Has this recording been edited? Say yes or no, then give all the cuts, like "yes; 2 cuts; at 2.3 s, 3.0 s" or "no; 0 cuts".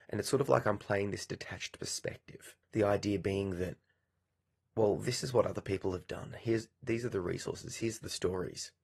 yes; 1 cut; at 2.6 s